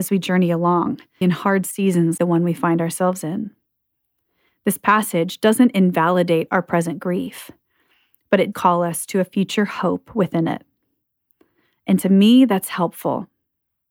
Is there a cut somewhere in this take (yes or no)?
yes